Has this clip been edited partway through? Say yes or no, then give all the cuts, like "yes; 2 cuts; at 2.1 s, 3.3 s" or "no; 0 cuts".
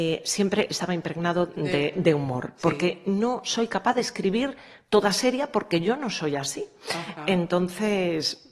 no; 0 cuts